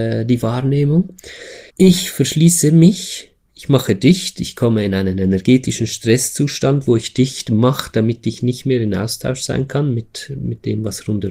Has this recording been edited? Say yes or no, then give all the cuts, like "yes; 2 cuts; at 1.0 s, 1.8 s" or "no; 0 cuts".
yes; 1 cut; at 1.7 s